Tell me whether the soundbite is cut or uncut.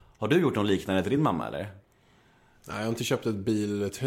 uncut